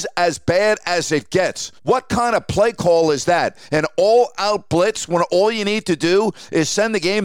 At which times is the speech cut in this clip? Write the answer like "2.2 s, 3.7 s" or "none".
1.8 s